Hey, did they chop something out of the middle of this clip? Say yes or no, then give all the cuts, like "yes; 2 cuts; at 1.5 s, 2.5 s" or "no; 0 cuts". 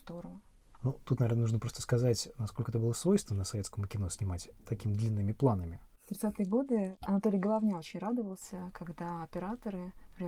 no; 0 cuts